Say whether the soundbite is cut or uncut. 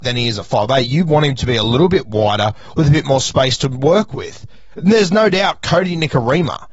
uncut